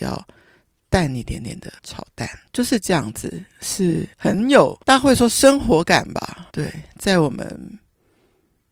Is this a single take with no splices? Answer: no; 5 cuts; at 1.8 s, 2.5 s, 4.1 s, 4.8 s, 6.5 s

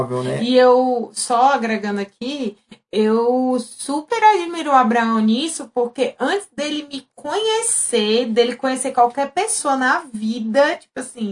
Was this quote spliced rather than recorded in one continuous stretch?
no; 0 cuts

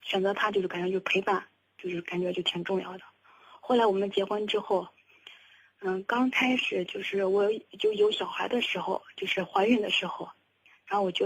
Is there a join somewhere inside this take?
no; 0 cuts

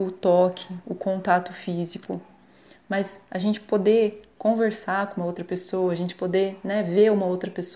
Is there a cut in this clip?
no; 0 cuts

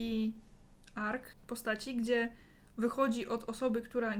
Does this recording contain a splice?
no; 0 cuts

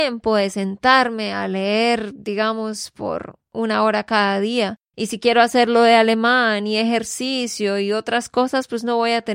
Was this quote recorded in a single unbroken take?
yes; 0 cuts

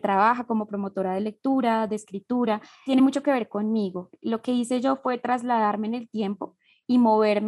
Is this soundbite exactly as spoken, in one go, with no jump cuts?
yes; 0 cuts

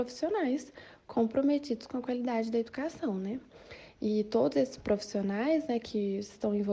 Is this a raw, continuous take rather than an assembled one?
yes; 0 cuts

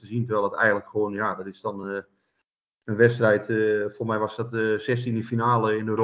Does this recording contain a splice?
no; 0 cuts

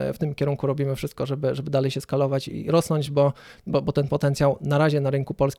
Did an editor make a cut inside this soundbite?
no; 0 cuts

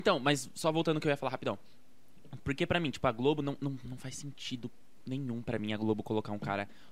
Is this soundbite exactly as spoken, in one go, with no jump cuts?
yes; 0 cuts

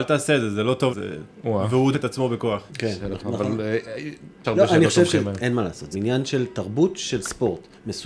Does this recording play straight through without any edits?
no; 6 cuts; at 0.9 s, 1.9 s, 2.7 s, 3.2 s, 4.4 s, 5.9 s

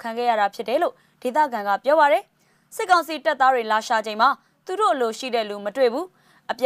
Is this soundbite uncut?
yes; 0 cuts

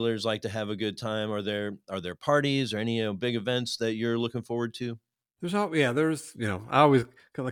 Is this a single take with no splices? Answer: yes; 0 cuts

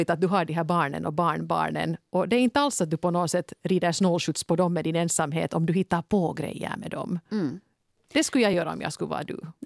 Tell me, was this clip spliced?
no; 0 cuts

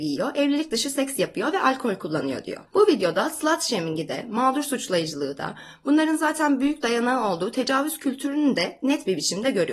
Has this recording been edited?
yes; 1 cut; at 2.7 s

